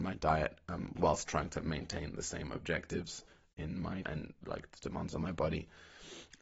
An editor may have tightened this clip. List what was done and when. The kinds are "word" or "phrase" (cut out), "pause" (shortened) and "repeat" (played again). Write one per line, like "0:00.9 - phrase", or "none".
0:04.0 - word